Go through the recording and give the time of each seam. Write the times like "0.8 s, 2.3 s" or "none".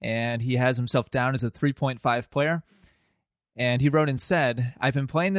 none